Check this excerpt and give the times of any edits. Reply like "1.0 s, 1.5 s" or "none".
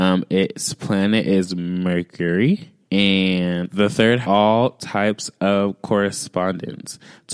2.9 s, 4.2 s

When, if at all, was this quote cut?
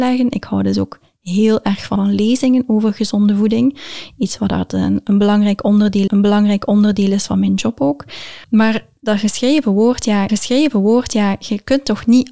2.0 s, 6.1 s, 8.4 s, 10.3 s

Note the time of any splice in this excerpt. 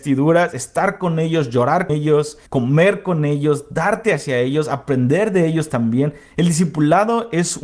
1.9 s, 2.5 s

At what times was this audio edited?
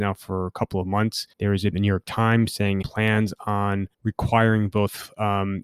1.3 s, 1.7 s, 2.8 s, 3.9 s

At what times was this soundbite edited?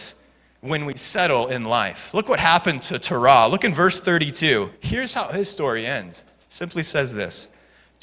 4.7 s, 6.4 s

